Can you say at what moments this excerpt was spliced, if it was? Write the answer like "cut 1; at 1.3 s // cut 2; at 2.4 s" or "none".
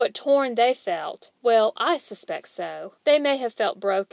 cut 1; at 1.4 s // cut 2; at 3.0 s